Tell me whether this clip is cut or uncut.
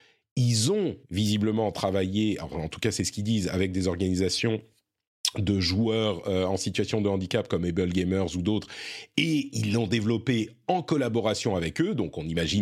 cut